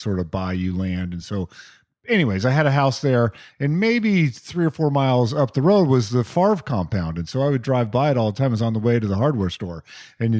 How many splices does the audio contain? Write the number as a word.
zero